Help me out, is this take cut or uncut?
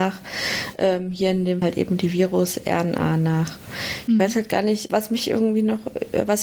cut